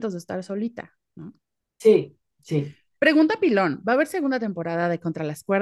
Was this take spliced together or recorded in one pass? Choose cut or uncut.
uncut